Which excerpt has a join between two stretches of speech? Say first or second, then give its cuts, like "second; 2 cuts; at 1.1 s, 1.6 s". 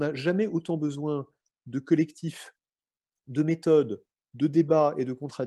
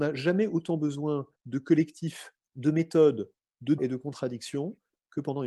second; 3 cuts; at 1.4 s, 2.4 s, 3.8 s